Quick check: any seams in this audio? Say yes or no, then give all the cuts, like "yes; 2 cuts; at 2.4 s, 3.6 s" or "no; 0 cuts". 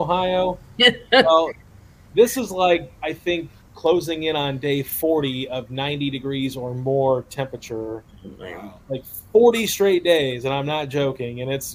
no; 0 cuts